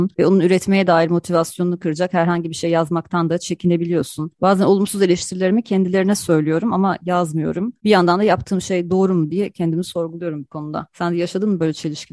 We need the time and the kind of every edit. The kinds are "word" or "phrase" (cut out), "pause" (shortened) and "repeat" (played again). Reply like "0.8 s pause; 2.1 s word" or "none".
none